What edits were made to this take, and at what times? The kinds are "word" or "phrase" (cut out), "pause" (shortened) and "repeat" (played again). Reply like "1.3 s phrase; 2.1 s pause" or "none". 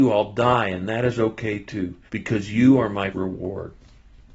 2.1 s pause; 3.1 s word